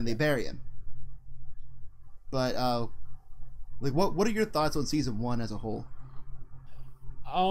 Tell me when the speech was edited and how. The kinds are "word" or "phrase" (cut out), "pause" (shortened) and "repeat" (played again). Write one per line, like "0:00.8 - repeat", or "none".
none

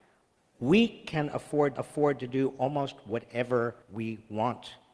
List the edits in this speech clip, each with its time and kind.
0:01.8 - repeat
0:03.8 - pause

